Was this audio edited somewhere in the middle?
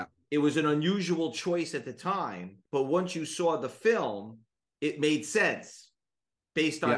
yes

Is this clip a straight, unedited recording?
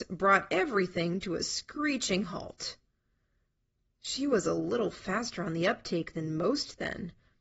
yes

